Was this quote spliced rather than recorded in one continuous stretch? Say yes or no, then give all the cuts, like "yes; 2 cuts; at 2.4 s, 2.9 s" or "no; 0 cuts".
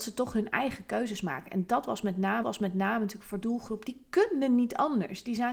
yes; 2 cuts; at 2.4 s, 3.4 s